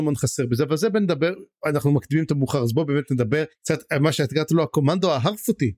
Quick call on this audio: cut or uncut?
cut